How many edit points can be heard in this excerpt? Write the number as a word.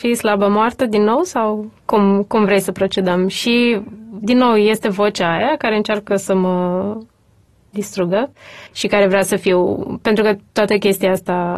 three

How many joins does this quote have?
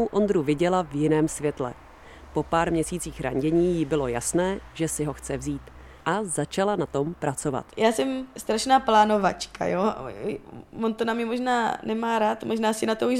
three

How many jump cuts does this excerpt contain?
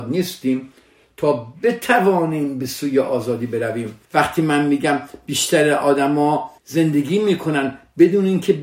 two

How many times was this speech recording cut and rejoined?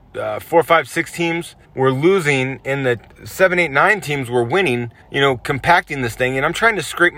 three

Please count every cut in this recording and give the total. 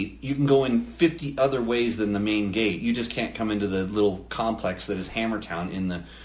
zero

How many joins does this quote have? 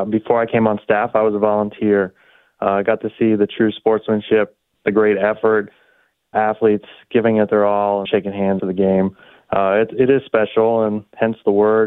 four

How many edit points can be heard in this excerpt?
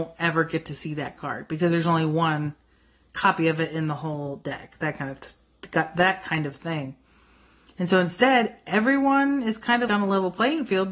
one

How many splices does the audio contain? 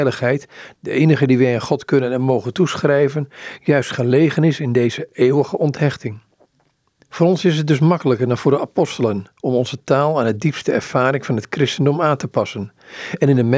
zero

